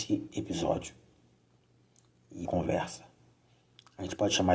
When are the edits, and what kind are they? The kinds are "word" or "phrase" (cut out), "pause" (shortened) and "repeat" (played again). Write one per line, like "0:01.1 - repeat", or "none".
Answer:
0:02.4 - word